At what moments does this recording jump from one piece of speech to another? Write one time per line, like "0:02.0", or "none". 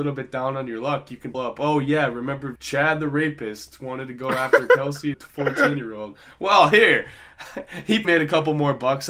0:01.3
0:02.6
0:05.1
0:08.0